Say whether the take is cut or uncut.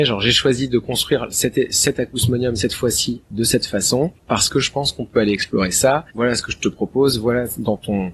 cut